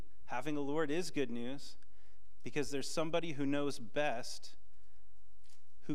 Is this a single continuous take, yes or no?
yes